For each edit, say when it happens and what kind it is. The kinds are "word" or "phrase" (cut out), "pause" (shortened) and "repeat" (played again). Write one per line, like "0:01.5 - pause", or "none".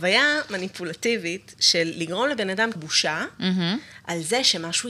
0:02.8 - word